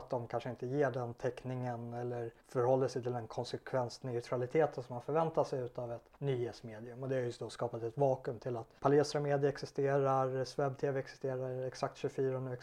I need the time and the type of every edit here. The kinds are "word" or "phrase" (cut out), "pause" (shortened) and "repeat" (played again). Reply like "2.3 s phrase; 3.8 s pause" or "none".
2.4 s pause; 6.2 s pause; 8.8 s pause